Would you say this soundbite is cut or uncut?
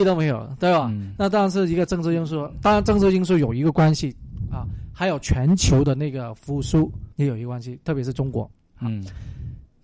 cut